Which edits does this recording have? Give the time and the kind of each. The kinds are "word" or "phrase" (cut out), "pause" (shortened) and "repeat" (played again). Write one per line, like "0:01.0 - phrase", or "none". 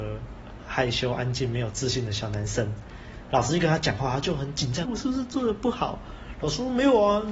0:04.8 - word

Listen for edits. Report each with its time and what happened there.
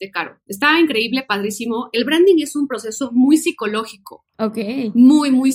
none

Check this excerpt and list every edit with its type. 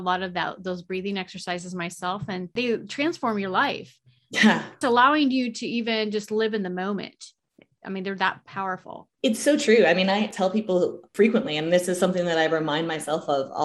0:04.8 - word

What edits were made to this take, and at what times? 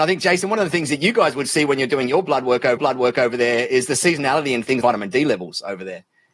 0:02.8 - repeat
0:04.8 - word

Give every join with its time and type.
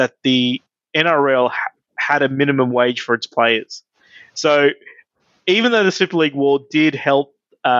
none

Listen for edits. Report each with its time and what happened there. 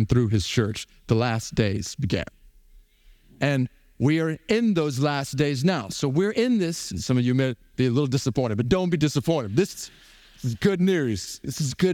none

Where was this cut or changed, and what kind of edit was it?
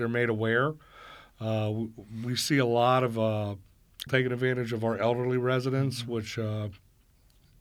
0:04.1 - word

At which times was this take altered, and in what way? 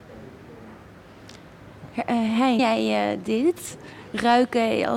0:02.6 - word

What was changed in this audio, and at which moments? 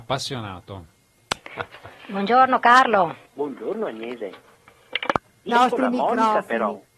0:03.3 - pause
0:05.5 - phrase

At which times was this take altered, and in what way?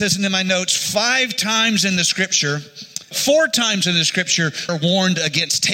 0:03.1 - word
0:04.7 - word

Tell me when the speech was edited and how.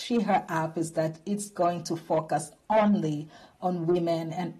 none

